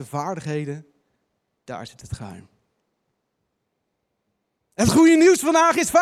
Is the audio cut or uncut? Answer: uncut